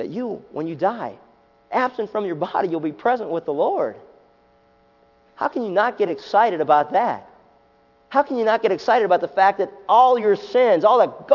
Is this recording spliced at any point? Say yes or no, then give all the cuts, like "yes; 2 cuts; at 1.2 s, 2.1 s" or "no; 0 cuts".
no; 0 cuts